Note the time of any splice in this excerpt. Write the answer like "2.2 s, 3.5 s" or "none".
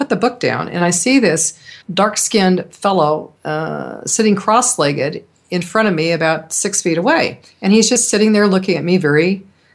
1.8 s, 3.4 s